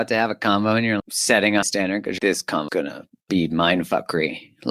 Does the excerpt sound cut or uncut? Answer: cut